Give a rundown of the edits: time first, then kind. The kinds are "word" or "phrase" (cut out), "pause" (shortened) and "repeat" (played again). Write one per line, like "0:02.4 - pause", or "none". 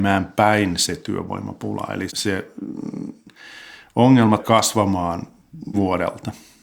0:02.1 - word
0:04.4 - word
0:05.7 - word